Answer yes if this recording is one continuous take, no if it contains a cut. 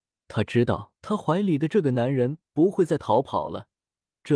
no